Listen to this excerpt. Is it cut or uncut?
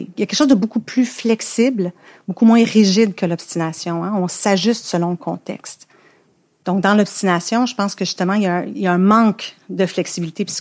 uncut